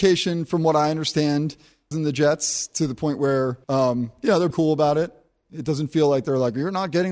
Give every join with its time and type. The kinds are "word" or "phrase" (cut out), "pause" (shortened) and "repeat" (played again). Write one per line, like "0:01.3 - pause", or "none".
0:01.9 - phrase
0:03.6 - pause
0:04.5 - word